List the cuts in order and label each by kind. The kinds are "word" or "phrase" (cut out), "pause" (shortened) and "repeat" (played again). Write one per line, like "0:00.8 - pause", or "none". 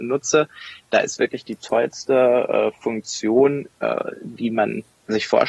none